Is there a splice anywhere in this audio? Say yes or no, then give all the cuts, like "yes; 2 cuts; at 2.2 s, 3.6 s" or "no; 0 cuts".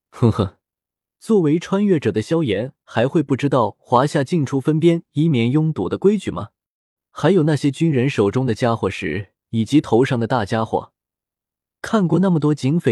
no; 0 cuts